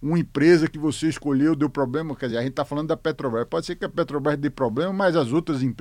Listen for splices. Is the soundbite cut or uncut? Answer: uncut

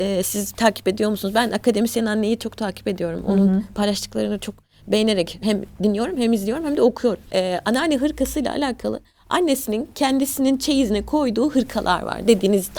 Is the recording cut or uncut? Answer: uncut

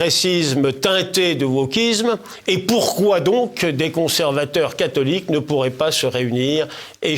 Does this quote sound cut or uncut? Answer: uncut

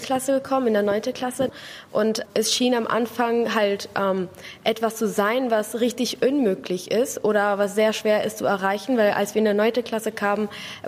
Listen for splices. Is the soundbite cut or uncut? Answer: cut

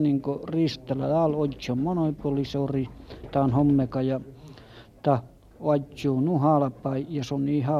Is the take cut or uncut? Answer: uncut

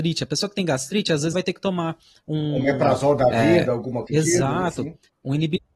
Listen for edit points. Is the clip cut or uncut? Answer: cut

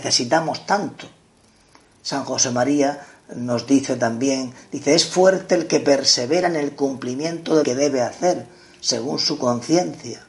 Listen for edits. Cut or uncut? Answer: cut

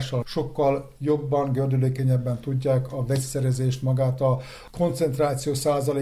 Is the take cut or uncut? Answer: uncut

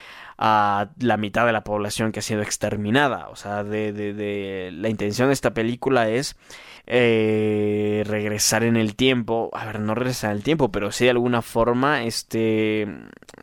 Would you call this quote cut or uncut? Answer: cut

